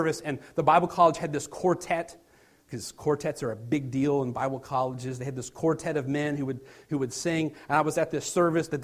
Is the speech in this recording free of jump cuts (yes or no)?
yes